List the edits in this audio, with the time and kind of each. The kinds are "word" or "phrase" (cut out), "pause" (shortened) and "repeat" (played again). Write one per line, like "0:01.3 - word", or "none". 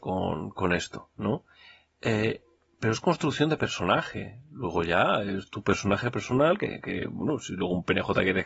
none

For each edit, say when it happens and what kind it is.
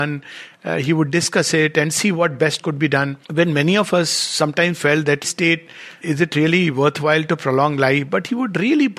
0:02.6 - word
0:03.2 - pause
0:05.2 - phrase
0:06.0 - word

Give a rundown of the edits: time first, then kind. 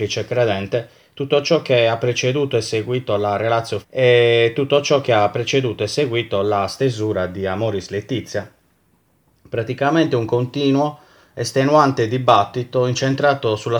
0:03.8 - word

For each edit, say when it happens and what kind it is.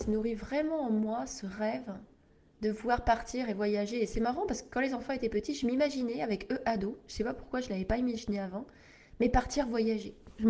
none

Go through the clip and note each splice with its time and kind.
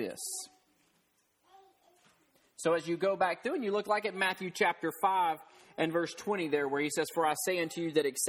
none

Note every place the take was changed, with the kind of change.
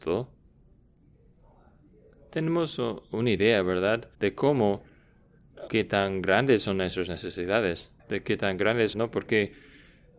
0:04.1 - pause
0:05.7 - word
0:08.0 - pause
0:08.9 - phrase

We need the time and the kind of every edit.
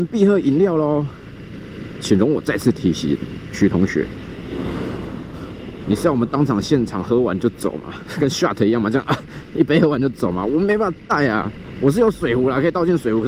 none

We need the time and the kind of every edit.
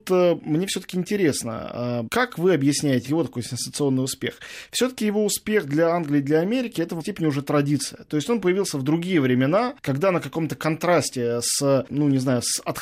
0:02.1 - word
0:03.0 - word
0:07.0 - word

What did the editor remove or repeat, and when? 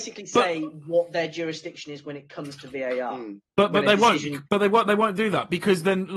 0:04.5 - pause

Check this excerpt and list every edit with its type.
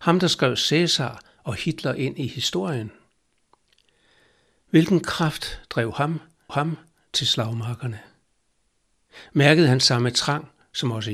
0:06.5 - repeat

